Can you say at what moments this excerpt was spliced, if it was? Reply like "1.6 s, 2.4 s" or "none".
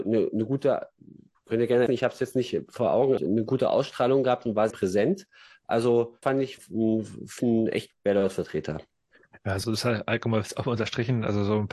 1.3 s, 1.9 s, 3.2 s, 4.7 s, 6.2 s, 6.6 s, 7.4 s, 7.9 s, 9.6 s